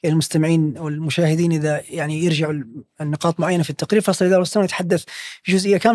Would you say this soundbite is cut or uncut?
uncut